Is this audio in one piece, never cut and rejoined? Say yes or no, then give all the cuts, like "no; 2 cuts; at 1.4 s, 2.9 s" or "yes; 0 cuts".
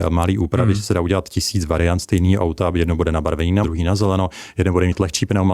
no; 1 cut; at 3.6 s